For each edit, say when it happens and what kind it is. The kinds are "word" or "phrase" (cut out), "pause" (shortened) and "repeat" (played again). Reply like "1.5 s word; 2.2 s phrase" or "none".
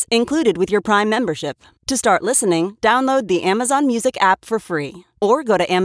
none